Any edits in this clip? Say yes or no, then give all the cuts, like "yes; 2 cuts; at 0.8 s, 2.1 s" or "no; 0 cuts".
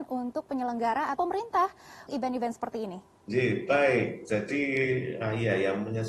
yes; 3 cuts; at 1.2 s, 2.1 s, 3.2 s